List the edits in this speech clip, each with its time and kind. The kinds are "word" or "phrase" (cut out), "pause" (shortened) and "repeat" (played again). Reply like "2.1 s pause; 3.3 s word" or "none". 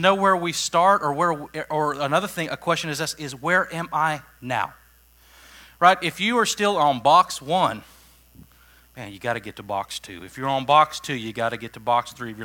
none